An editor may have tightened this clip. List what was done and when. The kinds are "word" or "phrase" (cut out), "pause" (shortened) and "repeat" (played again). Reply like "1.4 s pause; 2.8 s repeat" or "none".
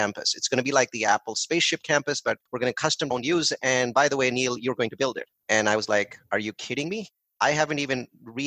3.1 s phrase